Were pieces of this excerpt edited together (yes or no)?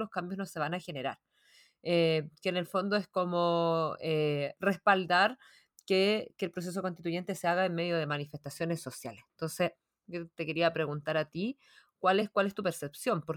no